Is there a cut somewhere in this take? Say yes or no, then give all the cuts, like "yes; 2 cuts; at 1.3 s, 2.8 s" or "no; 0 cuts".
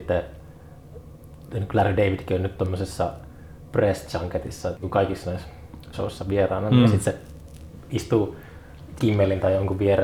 yes; 3 cuts; at 4.8 s, 5.9 s, 9.0 s